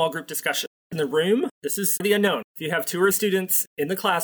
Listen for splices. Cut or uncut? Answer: cut